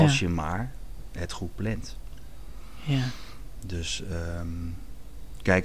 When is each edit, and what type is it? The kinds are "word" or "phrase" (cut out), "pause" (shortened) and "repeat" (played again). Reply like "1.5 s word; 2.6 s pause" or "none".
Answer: none